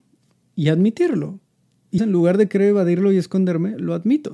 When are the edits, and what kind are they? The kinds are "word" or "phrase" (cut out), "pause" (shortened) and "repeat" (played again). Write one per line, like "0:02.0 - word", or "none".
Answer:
0:02.0 - word